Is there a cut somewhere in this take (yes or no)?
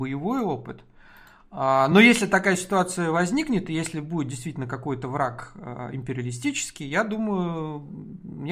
no